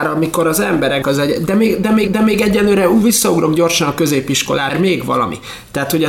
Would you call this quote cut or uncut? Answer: cut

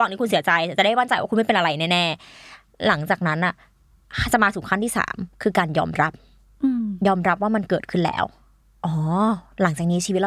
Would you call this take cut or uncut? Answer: uncut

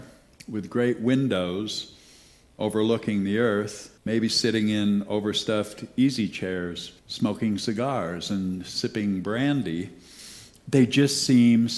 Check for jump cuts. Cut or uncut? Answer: cut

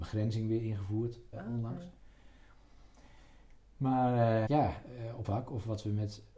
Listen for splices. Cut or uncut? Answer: cut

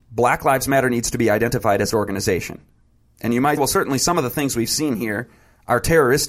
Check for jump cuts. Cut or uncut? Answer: cut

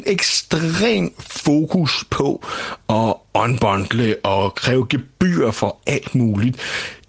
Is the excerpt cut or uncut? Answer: uncut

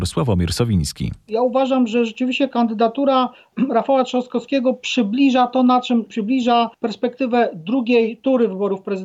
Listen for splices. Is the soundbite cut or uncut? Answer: cut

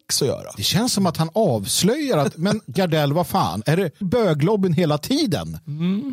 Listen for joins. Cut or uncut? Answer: cut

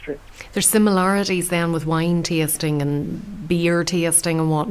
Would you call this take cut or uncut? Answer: uncut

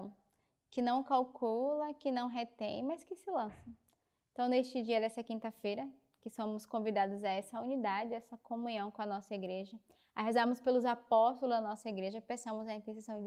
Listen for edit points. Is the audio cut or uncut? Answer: uncut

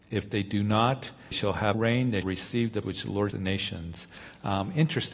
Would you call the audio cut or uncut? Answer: cut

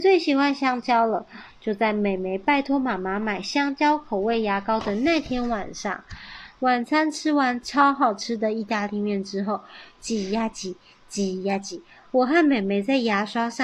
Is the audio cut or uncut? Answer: uncut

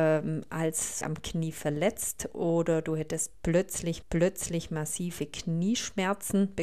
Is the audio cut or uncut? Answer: cut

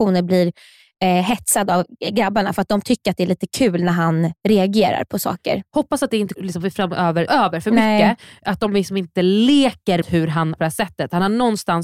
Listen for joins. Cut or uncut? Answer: cut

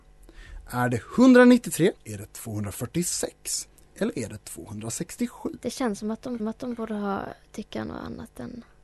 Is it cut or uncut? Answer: cut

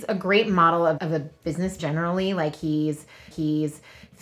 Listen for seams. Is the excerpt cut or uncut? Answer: cut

